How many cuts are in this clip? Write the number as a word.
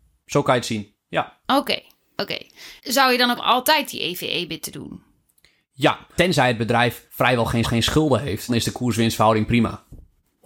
seven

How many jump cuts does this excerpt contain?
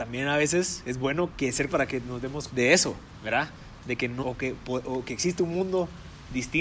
four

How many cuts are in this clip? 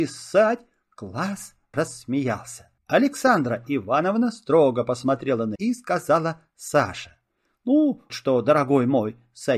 four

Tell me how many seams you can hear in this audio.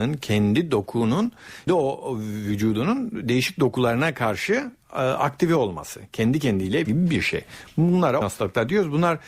three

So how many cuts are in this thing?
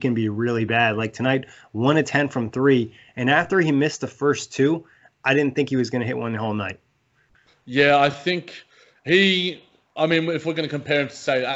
zero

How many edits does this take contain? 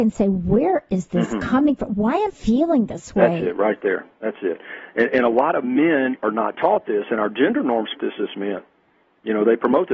two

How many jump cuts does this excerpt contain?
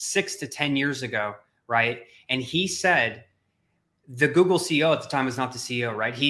zero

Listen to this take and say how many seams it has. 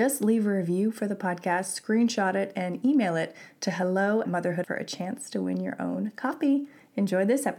two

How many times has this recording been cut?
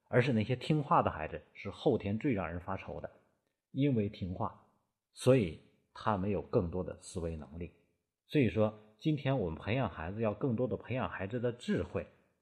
zero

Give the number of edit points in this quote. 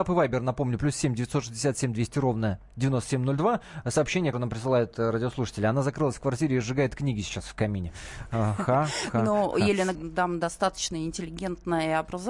two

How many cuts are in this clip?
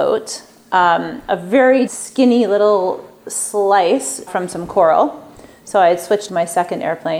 three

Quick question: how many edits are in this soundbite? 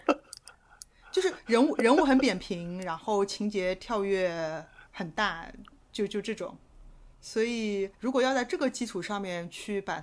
three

